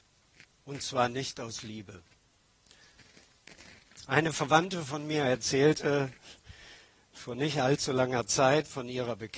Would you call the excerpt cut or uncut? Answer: uncut